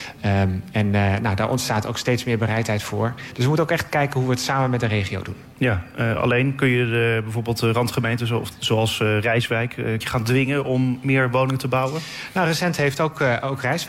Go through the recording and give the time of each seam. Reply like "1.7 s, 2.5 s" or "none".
10.0 s